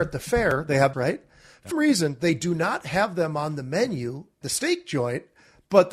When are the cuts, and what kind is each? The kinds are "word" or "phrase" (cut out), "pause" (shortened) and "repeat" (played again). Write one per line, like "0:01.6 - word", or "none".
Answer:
0:00.9 - word
0:01.7 - word
0:04.4 - word